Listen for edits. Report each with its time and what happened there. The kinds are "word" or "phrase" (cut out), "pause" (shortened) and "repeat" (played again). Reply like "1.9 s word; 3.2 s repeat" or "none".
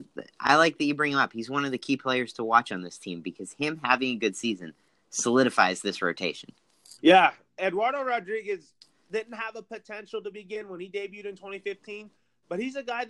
7.0 s pause